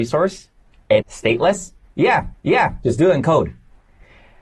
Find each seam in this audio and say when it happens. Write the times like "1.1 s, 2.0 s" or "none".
1.0 s, 2.3 s